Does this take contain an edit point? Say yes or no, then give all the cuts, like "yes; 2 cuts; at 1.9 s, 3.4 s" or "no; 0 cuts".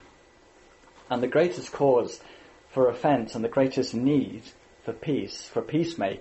no; 0 cuts